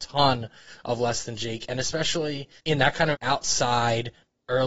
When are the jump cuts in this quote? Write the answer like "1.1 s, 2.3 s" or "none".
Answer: 2.6 s, 3.1 s